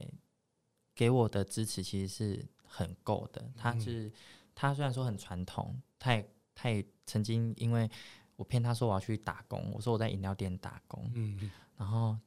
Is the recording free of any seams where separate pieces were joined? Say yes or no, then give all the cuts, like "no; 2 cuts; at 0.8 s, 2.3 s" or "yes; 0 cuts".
yes; 0 cuts